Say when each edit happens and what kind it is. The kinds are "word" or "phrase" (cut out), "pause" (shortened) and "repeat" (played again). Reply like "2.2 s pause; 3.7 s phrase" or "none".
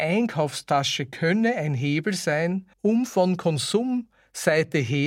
2.7 s pause